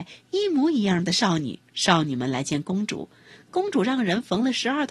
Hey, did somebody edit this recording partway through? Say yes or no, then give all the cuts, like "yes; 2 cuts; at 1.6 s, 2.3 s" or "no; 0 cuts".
yes; 1 cut; at 1.7 s